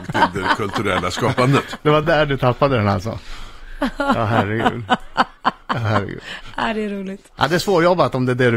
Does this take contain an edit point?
no; 0 cuts

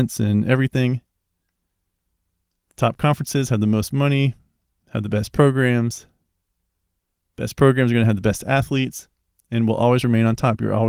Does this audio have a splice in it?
no; 0 cuts

